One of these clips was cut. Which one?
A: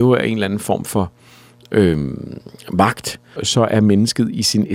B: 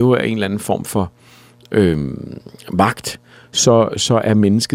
A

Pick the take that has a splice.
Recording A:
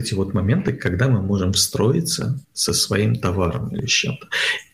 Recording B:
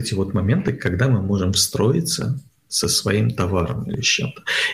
A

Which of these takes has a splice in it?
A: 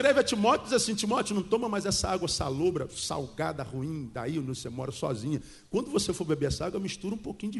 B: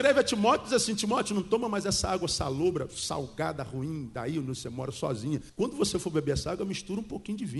B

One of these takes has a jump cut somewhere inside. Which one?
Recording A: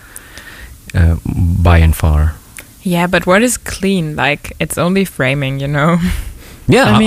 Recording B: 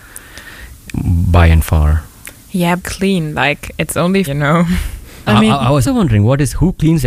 B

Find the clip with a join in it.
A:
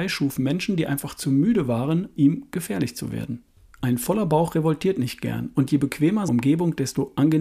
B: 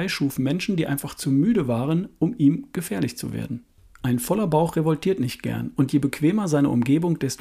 A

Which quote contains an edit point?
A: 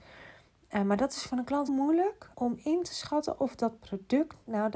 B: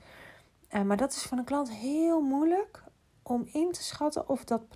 A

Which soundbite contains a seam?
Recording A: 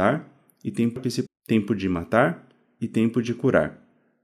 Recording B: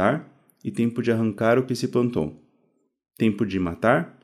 A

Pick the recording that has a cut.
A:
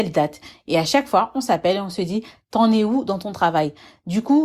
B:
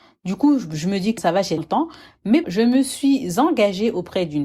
B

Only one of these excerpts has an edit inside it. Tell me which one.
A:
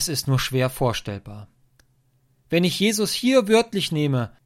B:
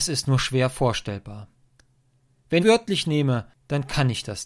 B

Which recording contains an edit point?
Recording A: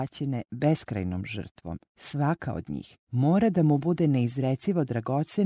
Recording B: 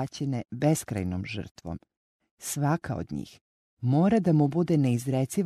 A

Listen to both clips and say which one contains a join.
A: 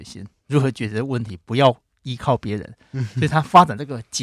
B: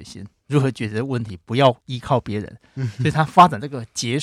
B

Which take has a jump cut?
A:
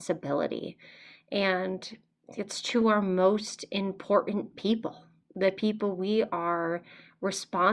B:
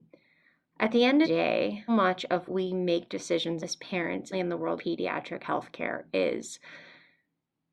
B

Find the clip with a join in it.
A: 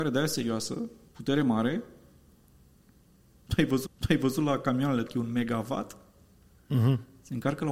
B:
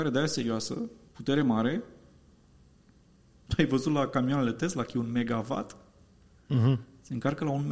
A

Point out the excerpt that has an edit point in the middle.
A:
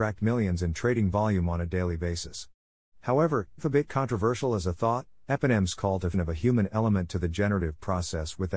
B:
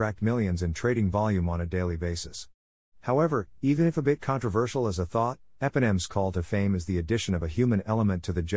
A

